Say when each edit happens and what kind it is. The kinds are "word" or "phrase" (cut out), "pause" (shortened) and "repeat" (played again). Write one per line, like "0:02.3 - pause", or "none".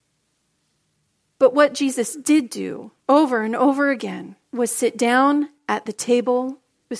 0:03.0 - pause
0:04.4 - pause